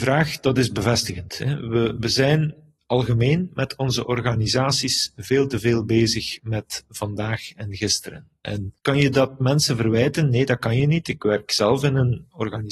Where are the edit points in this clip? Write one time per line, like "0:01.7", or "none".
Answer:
0:08.8